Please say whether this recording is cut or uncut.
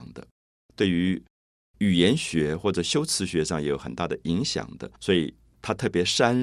cut